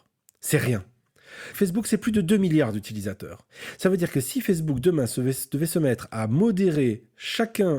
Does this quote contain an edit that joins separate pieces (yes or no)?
no